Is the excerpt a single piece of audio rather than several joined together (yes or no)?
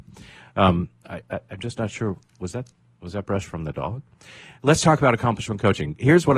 yes